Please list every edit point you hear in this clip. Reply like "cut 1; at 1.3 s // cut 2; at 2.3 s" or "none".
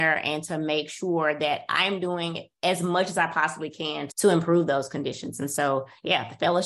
cut 1; at 4.1 s